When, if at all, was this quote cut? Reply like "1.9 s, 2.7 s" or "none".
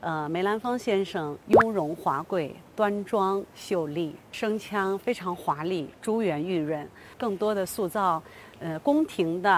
1.4 s